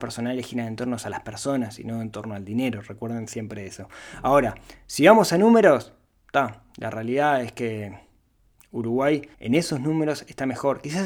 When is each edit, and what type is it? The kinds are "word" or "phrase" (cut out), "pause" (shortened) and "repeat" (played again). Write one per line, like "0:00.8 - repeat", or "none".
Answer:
0:09.3 - pause